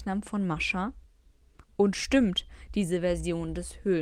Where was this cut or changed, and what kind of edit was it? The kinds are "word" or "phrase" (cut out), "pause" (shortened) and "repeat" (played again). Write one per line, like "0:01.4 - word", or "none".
none